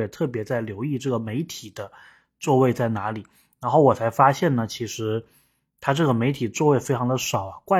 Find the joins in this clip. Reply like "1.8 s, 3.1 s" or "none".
none